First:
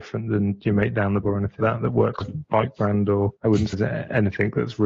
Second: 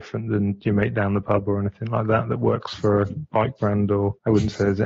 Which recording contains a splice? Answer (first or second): first